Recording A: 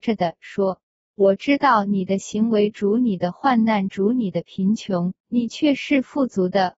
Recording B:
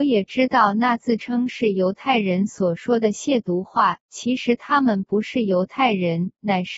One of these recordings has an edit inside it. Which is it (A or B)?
A